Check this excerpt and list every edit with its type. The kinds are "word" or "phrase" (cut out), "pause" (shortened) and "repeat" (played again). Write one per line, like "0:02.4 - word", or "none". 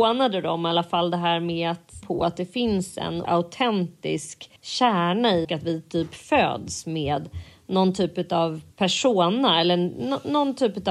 0:02.0 - word
0:03.2 - word
0:04.6 - pause
0:05.4 - phrase
0:08.7 - pause